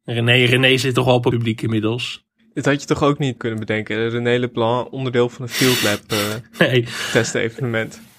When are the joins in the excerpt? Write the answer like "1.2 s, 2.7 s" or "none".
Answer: 1.3 s, 3.4 s